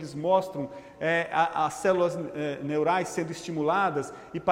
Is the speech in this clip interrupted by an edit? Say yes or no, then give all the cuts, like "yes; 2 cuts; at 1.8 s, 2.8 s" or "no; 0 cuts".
no; 0 cuts